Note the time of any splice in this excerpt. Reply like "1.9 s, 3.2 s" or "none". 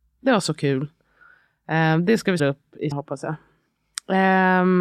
2.4 s, 2.9 s